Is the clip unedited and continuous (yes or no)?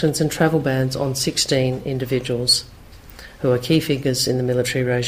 no